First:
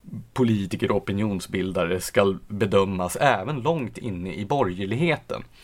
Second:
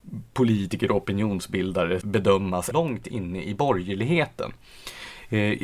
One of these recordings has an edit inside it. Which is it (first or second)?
second